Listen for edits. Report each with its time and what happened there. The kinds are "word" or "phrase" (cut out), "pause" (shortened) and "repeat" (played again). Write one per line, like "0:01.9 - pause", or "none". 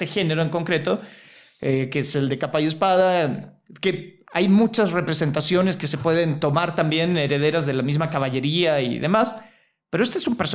none